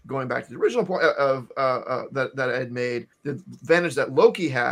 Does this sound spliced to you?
yes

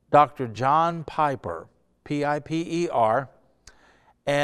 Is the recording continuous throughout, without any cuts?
yes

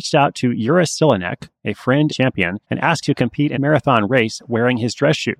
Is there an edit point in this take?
yes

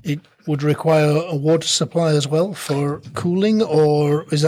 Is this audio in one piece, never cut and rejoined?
yes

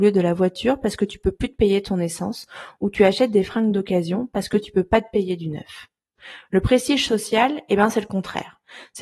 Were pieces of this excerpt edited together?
no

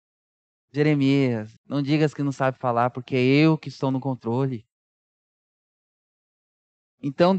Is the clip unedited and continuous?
no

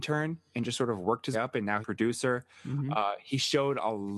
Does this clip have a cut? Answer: yes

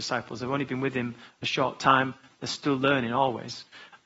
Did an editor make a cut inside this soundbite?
no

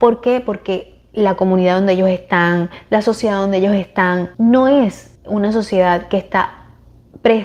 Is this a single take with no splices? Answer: no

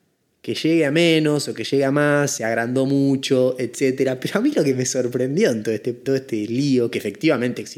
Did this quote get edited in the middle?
yes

